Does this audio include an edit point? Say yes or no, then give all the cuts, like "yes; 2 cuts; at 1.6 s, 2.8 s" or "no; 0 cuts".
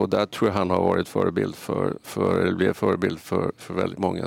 no; 0 cuts